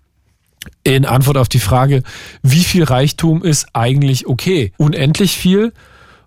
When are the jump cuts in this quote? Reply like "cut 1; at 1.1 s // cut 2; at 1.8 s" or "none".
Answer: cut 1; at 4.7 s